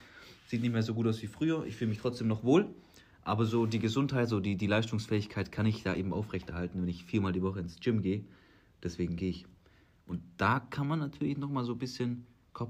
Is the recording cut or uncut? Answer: uncut